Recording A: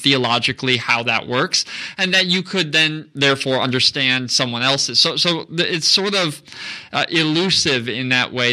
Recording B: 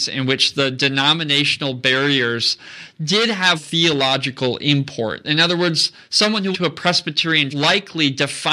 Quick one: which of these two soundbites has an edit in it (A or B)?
B